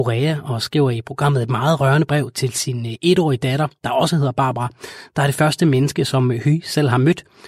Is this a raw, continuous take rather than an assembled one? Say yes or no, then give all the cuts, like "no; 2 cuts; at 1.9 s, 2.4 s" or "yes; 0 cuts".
yes; 0 cuts